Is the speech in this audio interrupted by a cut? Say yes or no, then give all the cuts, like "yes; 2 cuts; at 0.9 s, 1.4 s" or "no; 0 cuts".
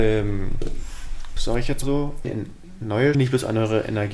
yes; 4 cuts; at 1.4 s, 1.8 s, 2.2 s, 3.1 s